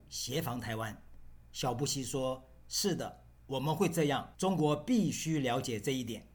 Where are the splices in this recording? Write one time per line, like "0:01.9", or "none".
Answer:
0:03.4
0:04.3